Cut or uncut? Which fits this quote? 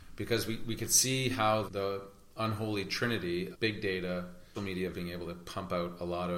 cut